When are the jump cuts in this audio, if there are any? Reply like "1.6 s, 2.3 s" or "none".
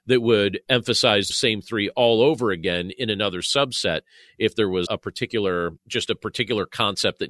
1.3 s, 4.9 s, 5.8 s